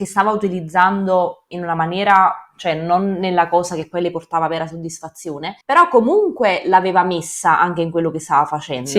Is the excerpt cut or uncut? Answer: cut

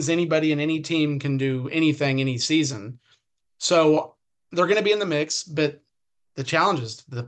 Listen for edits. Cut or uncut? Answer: uncut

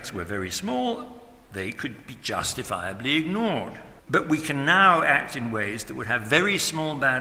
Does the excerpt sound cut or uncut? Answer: cut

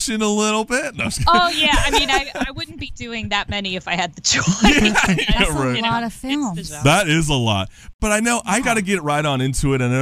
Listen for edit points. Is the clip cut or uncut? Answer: cut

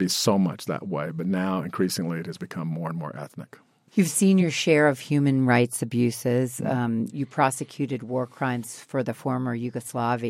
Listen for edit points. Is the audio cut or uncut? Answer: uncut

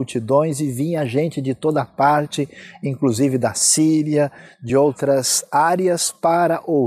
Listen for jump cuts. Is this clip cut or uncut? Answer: uncut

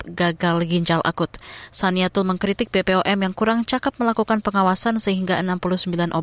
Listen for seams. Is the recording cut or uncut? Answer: uncut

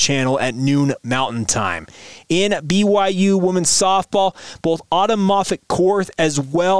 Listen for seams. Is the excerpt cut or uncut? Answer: uncut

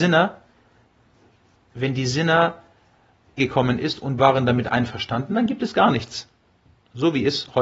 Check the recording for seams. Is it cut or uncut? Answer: cut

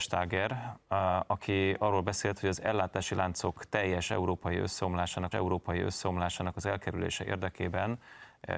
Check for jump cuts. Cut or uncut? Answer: cut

